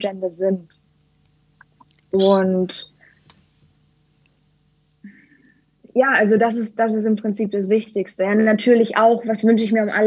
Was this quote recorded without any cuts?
yes; 0 cuts

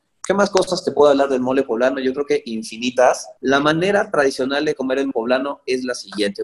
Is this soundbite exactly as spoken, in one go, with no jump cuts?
no; 1 cut; at 5.1 s

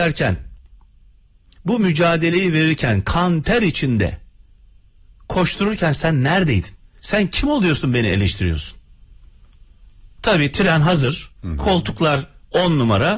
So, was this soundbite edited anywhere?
yes; 3 cuts; at 6.8 s, 10.1 s, 11.3 s

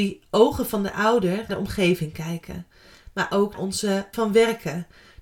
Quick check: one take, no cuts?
no; 3 cuts; at 1.5 s, 3.5 s, 4.1 s

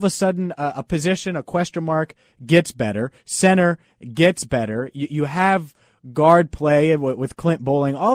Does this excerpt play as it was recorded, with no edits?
yes; 0 cuts

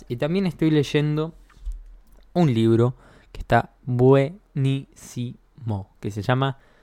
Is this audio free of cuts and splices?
yes; 0 cuts

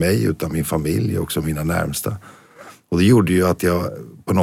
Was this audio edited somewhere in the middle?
no; 0 cuts

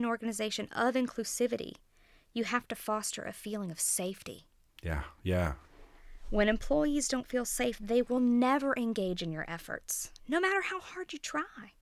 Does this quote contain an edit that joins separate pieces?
no; 0 cuts

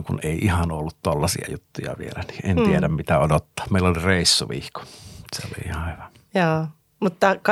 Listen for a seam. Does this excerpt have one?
no; 0 cuts

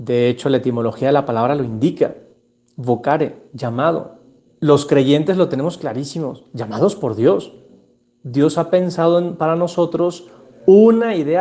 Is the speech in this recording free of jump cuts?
no; 1 cut; at 4.5 s

